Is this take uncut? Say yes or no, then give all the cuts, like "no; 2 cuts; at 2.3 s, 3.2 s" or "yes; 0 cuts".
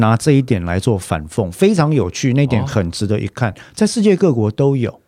yes; 0 cuts